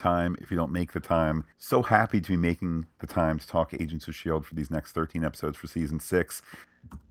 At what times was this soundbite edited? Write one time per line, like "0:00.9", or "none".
0:01.5